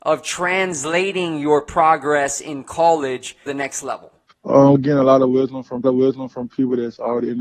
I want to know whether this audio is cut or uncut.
cut